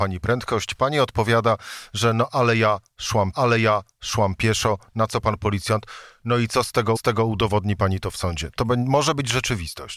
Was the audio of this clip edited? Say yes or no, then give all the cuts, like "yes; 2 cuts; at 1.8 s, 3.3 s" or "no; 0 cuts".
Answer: yes; 2 cuts; at 3.3 s, 7.0 s